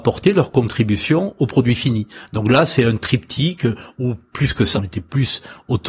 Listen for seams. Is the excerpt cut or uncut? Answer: cut